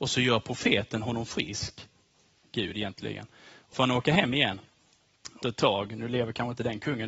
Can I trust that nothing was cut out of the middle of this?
no; 2 cuts; at 3.7 s, 5.4 s

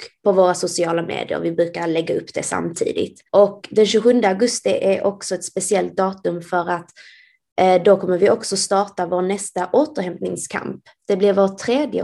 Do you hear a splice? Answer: yes; 1 cut; at 3.3 s

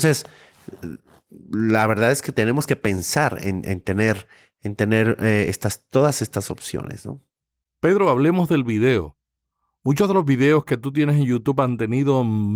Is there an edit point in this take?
no; 0 cuts

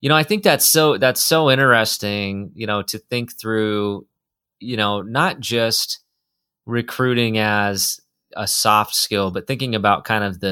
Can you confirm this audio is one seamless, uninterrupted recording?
yes; 0 cuts

